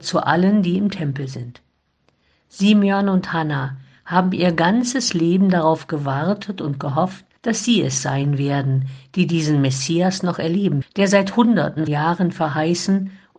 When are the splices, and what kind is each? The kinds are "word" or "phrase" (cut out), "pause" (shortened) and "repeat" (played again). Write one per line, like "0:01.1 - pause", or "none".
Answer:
0:07.4 - pause
0:10.8 - word
0:11.9 - word